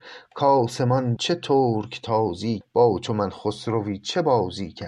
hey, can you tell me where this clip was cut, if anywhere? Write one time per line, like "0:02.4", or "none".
0:01.2
0:02.6